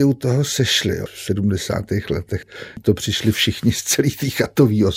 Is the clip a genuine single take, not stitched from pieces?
yes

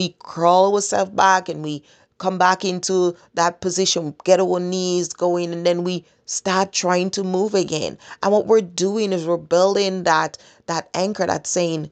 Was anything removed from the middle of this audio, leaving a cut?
no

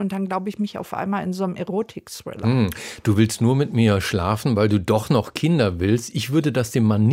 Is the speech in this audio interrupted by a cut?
no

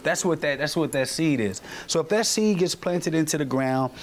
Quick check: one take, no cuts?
yes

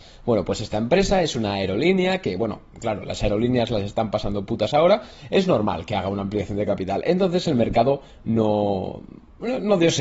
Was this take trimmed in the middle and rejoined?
no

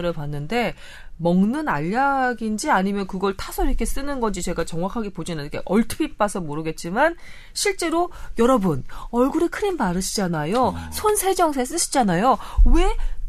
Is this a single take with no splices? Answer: yes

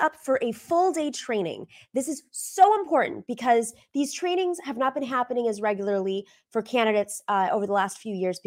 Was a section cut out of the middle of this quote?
no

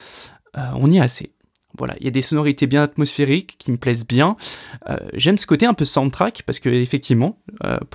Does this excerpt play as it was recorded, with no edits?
yes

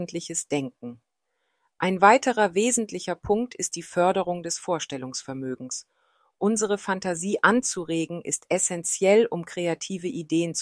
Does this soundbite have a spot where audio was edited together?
no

